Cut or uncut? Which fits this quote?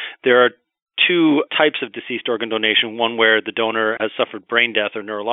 cut